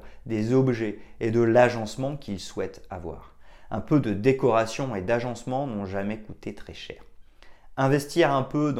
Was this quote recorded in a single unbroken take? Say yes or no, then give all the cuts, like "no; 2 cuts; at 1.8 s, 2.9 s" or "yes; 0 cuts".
yes; 0 cuts